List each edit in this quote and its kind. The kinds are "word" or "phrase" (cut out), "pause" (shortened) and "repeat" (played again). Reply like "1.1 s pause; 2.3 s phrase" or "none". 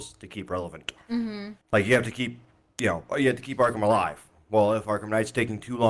1.6 s pause